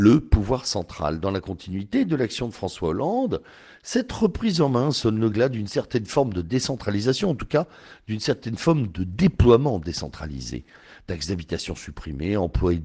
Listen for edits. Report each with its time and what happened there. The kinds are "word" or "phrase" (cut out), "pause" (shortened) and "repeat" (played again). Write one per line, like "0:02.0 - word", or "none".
none